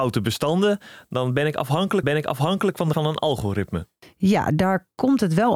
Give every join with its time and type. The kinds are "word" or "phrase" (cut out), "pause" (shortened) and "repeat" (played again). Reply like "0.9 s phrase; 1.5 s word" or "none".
2.0 s repeat; 2.9 s word